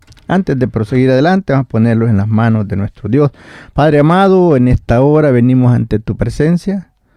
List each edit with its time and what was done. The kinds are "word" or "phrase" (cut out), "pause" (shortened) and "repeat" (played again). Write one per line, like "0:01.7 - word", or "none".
none